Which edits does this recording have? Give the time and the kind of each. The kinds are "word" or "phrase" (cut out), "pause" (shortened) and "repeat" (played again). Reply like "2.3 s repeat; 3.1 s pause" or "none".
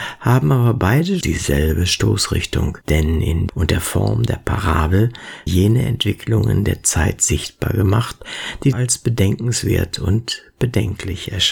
1.2 s word; 2.8 s pause; 3.5 s phrase; 5.5 s word; 8.7 s phrase